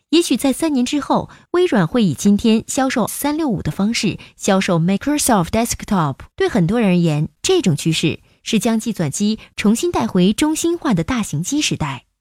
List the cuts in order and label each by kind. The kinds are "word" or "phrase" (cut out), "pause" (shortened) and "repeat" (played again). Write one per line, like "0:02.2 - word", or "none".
0:03.1 - word
0:05.5 - word
0:06.3 - pause